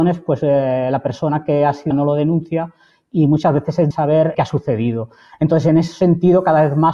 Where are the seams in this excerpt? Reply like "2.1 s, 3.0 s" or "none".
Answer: 1.9 s, 3.9 s, 4.3 s